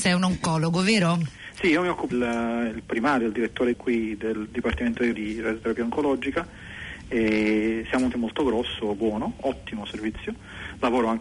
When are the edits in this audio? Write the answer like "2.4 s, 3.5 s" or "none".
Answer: 2.1 s, 3.7 s, 5.1 s, 8.1 s, 8.9 s